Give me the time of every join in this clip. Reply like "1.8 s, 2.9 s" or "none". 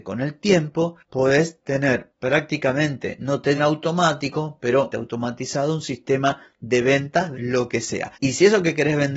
3.6 s, 4.9 s, 7.3 s